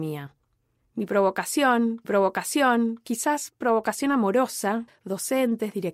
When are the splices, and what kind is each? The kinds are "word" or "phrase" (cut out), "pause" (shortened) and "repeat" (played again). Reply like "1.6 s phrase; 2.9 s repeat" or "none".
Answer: 2.0 s repeat; 4.9 s phrase